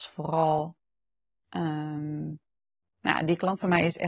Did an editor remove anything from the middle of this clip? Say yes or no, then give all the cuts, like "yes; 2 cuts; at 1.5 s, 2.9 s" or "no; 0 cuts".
no; 0 cuts